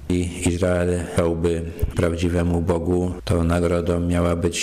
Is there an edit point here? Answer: yes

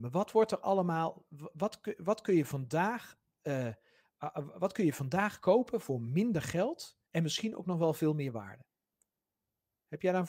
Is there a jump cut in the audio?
yes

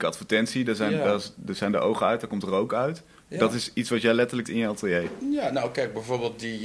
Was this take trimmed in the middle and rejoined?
yes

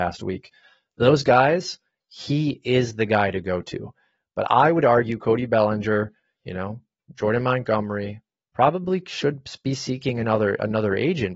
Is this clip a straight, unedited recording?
yes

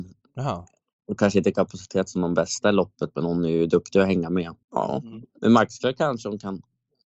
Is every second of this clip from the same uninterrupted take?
no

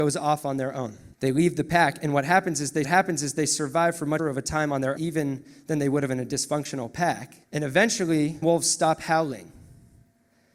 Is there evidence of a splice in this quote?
yes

